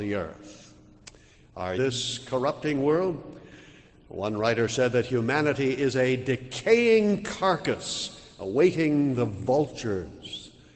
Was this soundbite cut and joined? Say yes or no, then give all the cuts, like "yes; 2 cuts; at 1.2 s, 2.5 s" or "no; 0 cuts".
yes; 1 cut; at 1.8 s